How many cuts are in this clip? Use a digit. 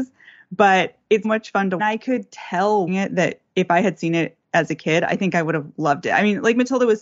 3